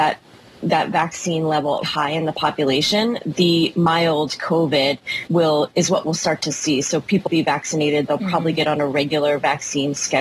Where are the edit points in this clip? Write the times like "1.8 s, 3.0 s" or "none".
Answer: 1.8 s, 5.3 s, 7.3 s